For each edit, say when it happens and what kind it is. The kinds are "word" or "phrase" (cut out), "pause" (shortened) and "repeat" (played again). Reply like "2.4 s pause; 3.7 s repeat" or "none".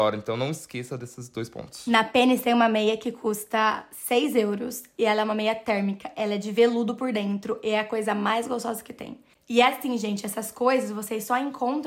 9.3 s pause